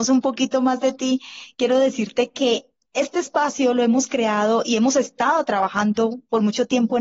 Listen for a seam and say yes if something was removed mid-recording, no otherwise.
no